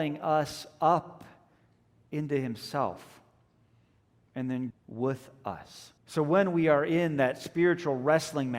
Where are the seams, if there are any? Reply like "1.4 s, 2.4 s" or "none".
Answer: 4.7 s, 6.0 s